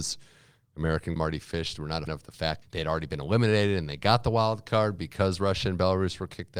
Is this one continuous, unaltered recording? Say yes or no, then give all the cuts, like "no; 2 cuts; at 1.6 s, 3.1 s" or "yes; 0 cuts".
no; 3 cuts; at 1.2 s, 2.1 s, 2.6 s